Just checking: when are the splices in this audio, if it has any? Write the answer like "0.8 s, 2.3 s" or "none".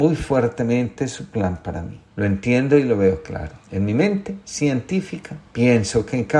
2.1 s, 3.6 s, 5.5 s